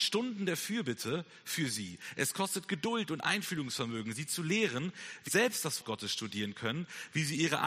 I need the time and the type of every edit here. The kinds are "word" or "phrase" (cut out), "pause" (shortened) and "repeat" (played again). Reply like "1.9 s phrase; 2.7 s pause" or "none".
5.3 s word; 5.8 s word